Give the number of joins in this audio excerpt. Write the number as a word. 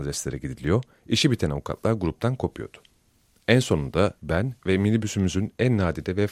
one